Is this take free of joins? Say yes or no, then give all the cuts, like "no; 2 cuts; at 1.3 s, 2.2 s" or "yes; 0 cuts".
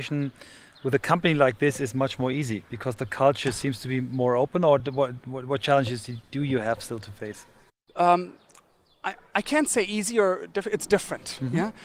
yes; 0 cuts